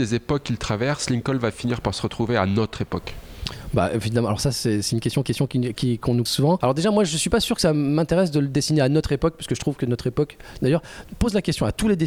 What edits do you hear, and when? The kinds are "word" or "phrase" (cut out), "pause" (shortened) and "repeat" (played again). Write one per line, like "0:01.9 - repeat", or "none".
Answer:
0:05.2 - repeat
0:06.3 - word